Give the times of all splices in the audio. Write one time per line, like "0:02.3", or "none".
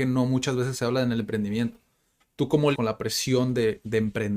0:02.7